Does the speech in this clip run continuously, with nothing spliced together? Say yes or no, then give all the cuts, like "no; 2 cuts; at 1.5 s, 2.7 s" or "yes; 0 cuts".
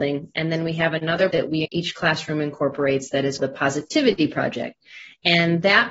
no; 3 cuts; at 1.3 s, 1.6 s, 3.4 s